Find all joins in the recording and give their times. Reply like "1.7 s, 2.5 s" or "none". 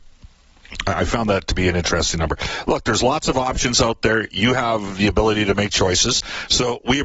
none